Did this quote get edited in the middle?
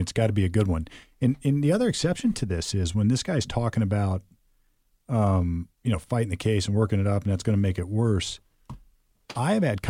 yes; 1 cut; at 5.7 s

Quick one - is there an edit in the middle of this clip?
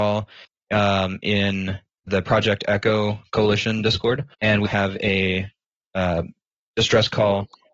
yes; 3 cuts; at 2.1 s, 4.3 s, 4.7 s

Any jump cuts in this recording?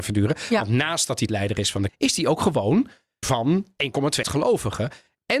yes; 4 cuts; at 1.3 s, 1.9 s, 3.2 s, 4.2 s

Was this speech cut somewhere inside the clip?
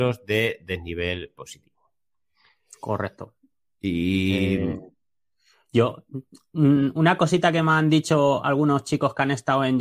no; 0 cuts

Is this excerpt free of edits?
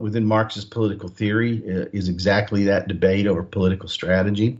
yes; 0 cuts

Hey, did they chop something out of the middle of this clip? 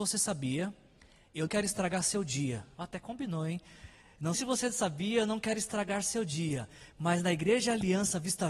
yes; 2 cuts; at 1.5 s, 4.3 s

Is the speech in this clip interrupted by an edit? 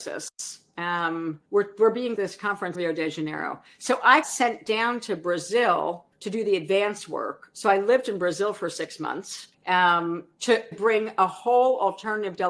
yes; 7 cuts; at 1.5 s, 2.2 s, 2.7 s, 4.2 s, 6.1 s, 9.5 s, 10.7 s

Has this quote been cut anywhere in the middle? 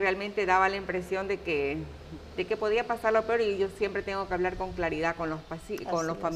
no; 0 cuts

